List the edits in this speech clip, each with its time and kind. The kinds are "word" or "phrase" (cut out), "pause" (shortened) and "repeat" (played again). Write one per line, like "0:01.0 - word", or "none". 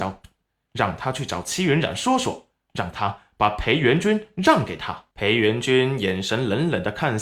0:05.1 - pause

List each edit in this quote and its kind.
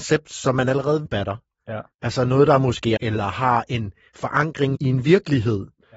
0:01.1 - word
0:01.9 - pause
0:03.0 - phrase
0:04.7 - word

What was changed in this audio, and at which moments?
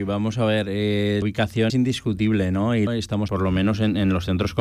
0:01.2 - word
0:01.7 - word
0:02.9 - word
0:03.3 - word

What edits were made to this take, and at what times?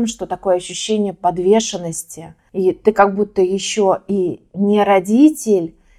none

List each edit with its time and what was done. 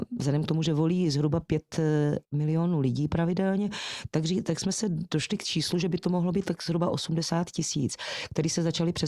0:02.2 - pause

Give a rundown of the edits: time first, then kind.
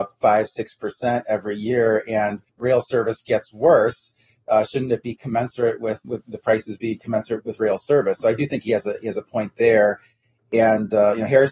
0:02.5 - pause
0:06.0 - word
0:07.4 - word

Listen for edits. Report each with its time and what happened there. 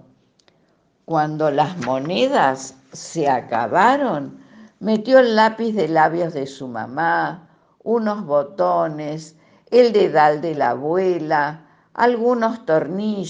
none

